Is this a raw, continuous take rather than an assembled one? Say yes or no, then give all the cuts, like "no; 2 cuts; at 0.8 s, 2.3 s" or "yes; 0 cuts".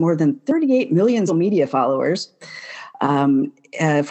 no; 1 cut; at 1.3 s